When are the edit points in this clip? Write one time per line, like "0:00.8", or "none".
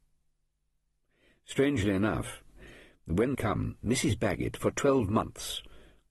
0:03.3